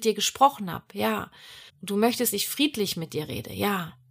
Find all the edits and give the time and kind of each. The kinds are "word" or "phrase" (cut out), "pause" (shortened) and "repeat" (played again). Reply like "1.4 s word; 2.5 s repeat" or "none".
1.7 s pause; 2.3 s word